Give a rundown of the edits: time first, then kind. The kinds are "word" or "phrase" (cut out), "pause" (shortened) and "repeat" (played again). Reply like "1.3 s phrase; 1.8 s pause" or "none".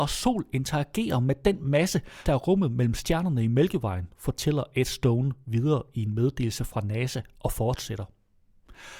2.3 s phrase